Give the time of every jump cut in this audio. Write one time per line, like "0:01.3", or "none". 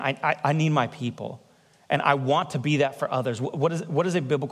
none

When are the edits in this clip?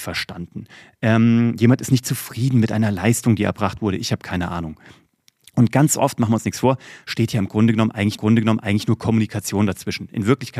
0:08.2

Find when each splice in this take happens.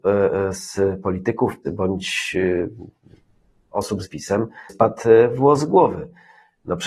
0:01.6
0:04.0
0:04.7

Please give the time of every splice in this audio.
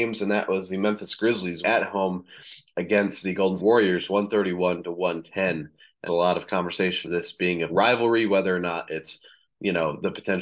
0:01.6
0:03.6
0:06.1
0:07.0
0:07.7

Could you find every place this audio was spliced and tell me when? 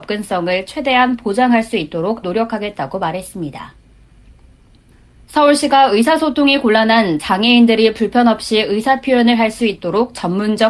0:02.2

